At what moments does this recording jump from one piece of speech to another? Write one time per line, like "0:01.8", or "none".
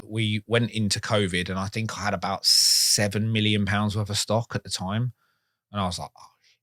none

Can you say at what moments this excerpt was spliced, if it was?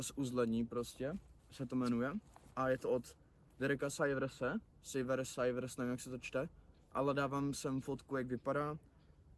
0:01.4
0:04.7

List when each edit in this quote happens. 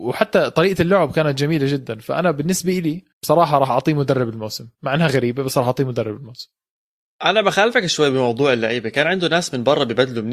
0:03.1

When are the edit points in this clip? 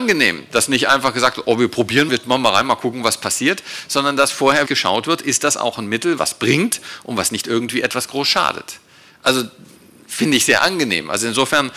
0:02.1
0:04.6
0:06.2

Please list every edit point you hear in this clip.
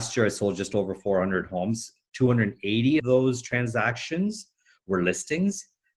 0:03.0

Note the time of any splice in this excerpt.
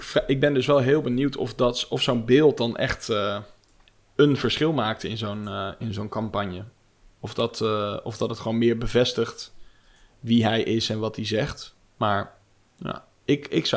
none

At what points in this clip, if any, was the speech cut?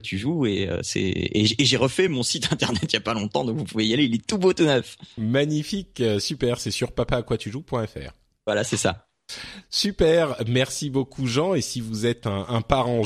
none

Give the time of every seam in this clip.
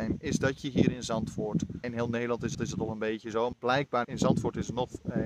0:01.8
0:02.5
0:03.5
0:04.0

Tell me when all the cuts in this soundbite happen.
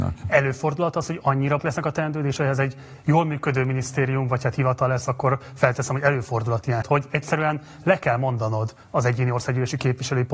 0:01.6
0:06.8
0:08.8

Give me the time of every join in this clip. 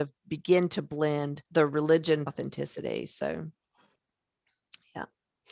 0:01.5
0:02.3

